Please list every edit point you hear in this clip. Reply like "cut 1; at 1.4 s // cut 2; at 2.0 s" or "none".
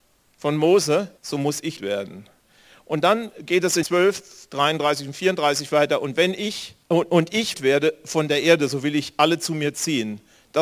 cut 1; at 1.2 s // cut 2; at 1.8 s // cut 3; at 2.4 s // cut 4; at 3.8 s // cut 5; at 6.8 s // cut 6; at 7.5 s